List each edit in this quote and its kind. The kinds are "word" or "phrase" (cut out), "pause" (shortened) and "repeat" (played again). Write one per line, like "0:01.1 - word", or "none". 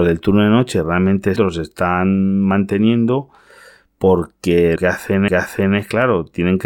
0:01.4 - phrase
0:04.8 - word
0:05.3 - repeat